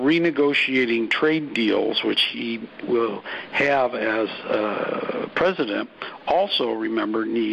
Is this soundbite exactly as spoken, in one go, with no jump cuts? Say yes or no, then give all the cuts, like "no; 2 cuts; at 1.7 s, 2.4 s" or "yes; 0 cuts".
yes; 0 cuts